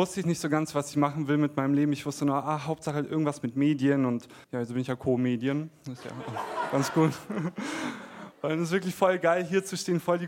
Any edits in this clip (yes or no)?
yes